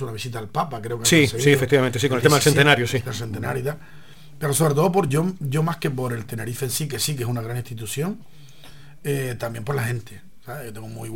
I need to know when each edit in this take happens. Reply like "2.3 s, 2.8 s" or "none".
none